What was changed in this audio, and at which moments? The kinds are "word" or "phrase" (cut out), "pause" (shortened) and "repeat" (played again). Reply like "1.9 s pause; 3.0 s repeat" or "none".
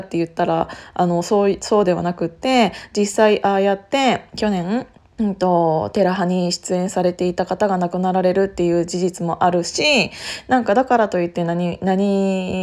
5.0 s pause